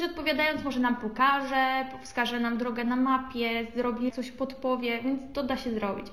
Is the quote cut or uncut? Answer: cut